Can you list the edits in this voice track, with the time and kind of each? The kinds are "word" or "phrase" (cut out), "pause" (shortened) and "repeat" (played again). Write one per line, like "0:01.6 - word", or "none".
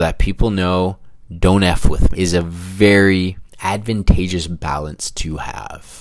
0:02.1 - word